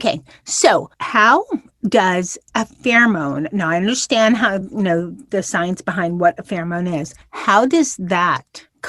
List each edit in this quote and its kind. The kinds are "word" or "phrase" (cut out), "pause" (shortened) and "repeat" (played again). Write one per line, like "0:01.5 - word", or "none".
none